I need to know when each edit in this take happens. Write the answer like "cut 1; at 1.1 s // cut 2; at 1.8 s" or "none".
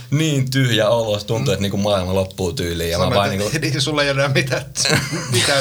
none

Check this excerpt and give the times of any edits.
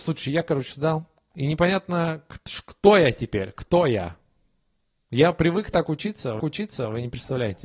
cut 1; at 6.4 s

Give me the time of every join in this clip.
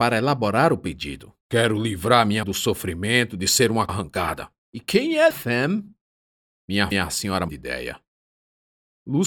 cut 1; at 1.4 s // cut 2; at 2.4 s // cut 3; at 3.9 s // cut 4; at 4.6 s // cut 5; at 5.3 s // cut 6; at 6.9 s // cut 7; at 7.5 s

